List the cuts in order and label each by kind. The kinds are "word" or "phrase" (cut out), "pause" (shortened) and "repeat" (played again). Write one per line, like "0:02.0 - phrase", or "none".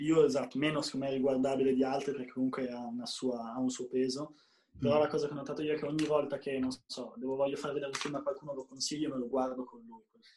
none